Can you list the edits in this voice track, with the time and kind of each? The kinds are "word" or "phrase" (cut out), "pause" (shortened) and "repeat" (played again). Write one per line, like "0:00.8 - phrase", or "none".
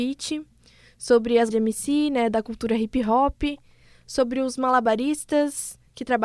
0:01.5 - word